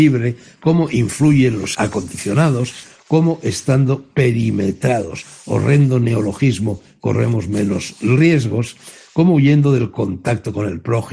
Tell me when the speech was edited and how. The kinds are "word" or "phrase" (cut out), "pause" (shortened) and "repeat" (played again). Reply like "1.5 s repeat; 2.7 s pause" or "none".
1.7 s word